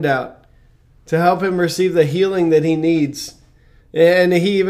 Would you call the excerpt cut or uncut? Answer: uncut